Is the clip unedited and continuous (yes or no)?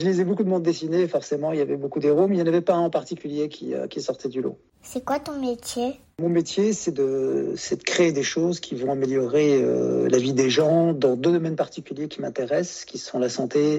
yes